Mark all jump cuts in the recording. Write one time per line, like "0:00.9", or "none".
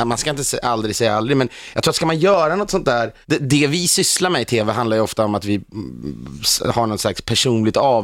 0:03.2